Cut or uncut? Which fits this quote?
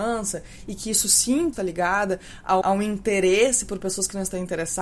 cut